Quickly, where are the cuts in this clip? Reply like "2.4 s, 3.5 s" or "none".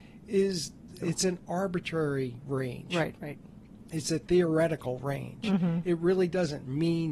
1.0 s